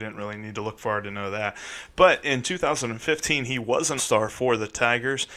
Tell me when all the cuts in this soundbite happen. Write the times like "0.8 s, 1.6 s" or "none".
4.0 s